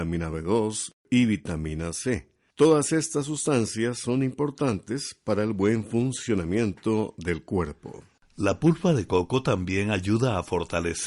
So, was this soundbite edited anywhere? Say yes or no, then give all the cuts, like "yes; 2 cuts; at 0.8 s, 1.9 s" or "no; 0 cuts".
no; 0 cuts